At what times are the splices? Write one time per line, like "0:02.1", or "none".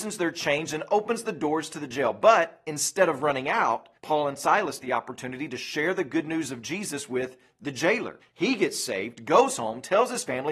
0:04.0
0:04.8
0:08.2